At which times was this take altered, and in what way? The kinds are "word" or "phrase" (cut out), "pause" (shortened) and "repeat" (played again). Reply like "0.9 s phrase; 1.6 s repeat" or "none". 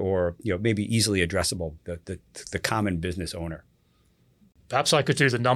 1.8 s word